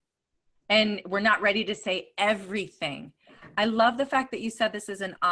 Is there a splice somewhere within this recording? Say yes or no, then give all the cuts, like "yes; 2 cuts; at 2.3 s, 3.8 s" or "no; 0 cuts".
no; 0 cuts